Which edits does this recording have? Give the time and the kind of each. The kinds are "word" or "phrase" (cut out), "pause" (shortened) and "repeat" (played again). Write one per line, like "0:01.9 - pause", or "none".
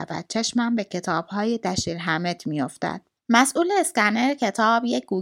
0:03.2 - pause